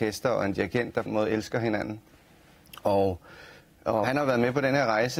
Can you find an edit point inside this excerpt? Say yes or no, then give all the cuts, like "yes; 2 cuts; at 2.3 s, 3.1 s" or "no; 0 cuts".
yes; 2 cuts; at 1.1 s, 4.0 s